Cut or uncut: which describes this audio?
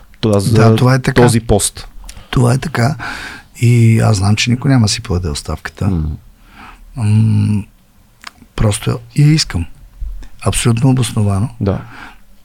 uncut